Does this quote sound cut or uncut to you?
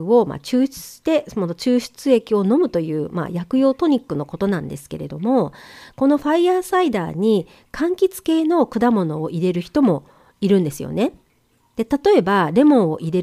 uncut